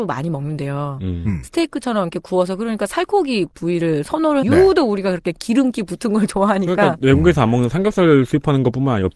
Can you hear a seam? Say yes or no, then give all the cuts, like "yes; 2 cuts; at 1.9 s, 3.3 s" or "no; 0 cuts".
yes; 1 cut; at 4.4 s